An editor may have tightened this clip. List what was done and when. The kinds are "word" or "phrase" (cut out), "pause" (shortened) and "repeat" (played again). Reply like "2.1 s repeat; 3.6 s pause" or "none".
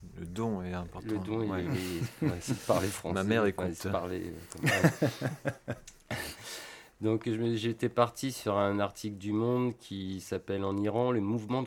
none